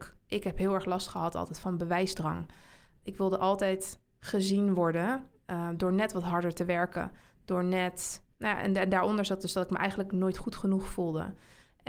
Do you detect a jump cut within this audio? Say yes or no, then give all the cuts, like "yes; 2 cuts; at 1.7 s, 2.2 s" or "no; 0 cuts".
no; 0 cuts